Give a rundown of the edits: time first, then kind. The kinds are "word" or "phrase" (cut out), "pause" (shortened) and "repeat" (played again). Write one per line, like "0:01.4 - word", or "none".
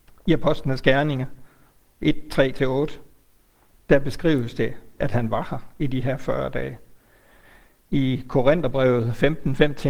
none